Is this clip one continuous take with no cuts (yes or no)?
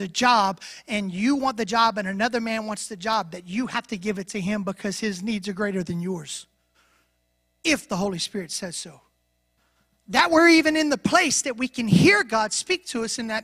yes